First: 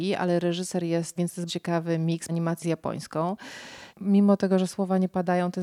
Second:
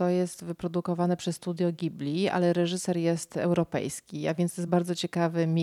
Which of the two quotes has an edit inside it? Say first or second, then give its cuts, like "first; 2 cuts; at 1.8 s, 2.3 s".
first; 5 cuts; at 1.2 s, 1.5 s, 2.3 s, 2.6 s, 3.9 s